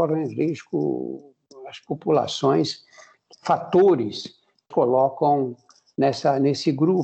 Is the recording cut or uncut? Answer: cut